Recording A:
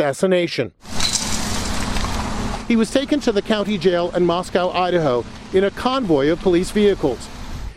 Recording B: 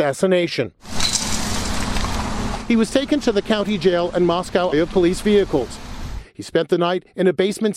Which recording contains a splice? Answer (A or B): B